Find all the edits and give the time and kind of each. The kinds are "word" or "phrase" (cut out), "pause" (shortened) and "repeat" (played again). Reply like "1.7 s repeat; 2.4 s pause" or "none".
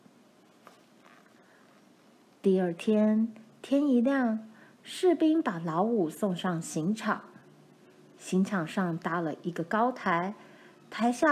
none